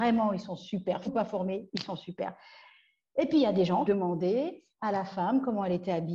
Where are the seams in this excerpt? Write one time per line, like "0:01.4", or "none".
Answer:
0:01.1
0:03.9

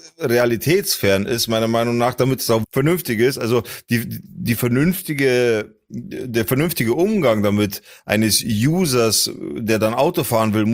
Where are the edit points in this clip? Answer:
0:02.6

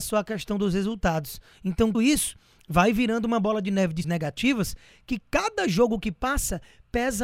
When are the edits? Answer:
0:01.9
0:04.0

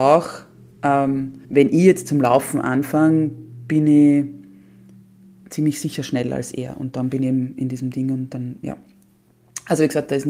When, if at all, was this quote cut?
0:01.4

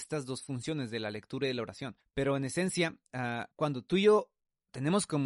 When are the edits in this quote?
0:02.0
0:03.5

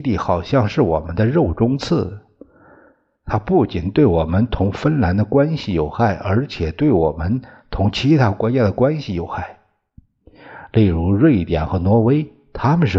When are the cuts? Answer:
none

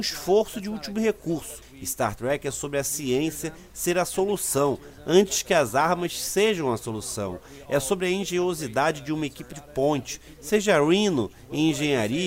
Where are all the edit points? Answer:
none

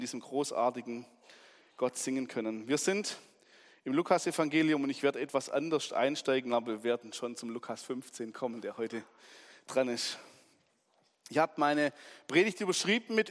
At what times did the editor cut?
none

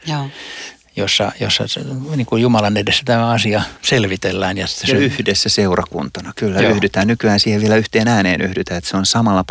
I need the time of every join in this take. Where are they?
0:03.8

